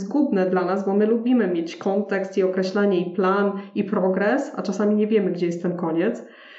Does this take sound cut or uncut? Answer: uncut